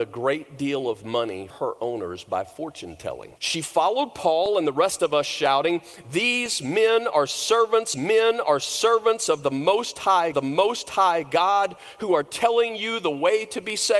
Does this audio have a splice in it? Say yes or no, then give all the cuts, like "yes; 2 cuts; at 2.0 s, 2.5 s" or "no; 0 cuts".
yes; 4 cuts; at 1.5 s, 3.4 s, 7.9 s, 10.3 s